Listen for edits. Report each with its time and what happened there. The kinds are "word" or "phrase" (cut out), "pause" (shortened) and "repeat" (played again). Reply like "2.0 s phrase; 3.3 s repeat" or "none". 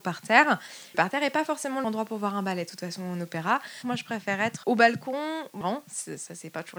0.9 s phrase; 1.8 s word; 4.6 s word; 5.6 s phrase